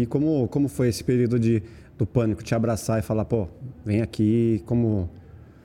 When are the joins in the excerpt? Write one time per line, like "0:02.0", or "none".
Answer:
none